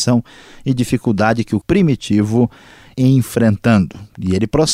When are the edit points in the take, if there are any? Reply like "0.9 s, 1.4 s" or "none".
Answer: 1.6 s, 2.9 s